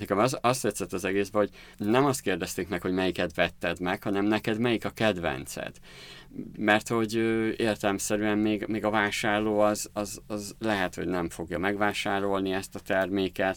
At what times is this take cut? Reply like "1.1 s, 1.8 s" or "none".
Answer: 1.7 s